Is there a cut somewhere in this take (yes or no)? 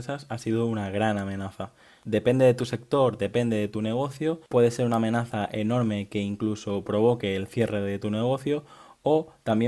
no